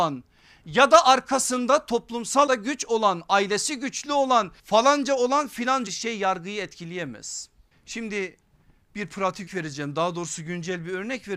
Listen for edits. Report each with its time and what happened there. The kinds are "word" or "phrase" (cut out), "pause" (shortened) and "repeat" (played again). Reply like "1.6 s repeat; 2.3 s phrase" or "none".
2.5 s word; 4.6 s pause; 5.9 s phrase; 7.7 s pause; 9.5 s word